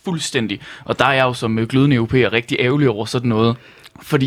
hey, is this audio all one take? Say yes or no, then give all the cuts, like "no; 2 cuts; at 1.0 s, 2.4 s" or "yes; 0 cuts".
yes; 0 cuts